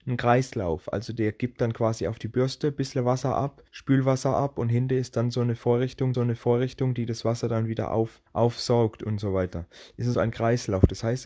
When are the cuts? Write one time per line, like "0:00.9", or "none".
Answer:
0:03.7
0:06.1
0:08.3
0:10.1

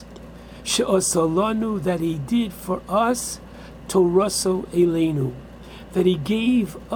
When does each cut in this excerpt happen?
0:03.8

